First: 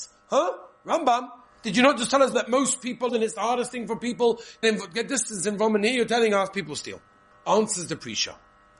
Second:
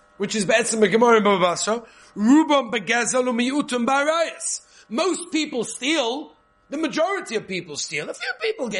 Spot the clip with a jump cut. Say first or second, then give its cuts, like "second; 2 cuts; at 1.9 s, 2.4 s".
first; 4 cuts; at 2.3 s, 3.1 s, 4.6 s, 7.3 s